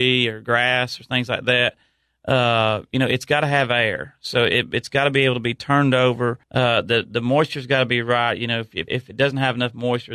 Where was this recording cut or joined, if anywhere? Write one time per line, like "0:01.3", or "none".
0:06.4
0:08.9